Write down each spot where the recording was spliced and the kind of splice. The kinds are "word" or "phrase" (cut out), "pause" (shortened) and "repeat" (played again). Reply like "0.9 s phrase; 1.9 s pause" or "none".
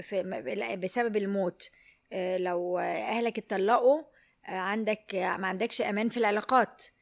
none